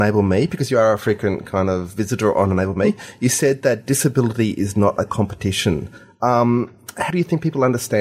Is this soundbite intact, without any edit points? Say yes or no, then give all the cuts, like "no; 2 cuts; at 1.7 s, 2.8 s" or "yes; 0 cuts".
no; 1 cut; at 7.1 s